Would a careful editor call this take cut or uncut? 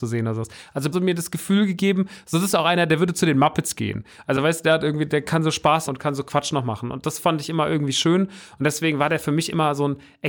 cut